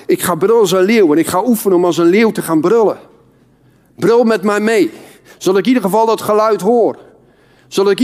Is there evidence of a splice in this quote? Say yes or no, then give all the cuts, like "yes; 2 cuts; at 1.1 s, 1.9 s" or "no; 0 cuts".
no; 0 cuts